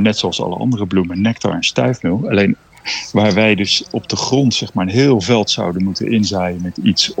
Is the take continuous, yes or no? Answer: yes